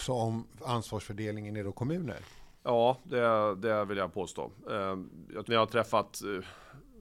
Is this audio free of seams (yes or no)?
no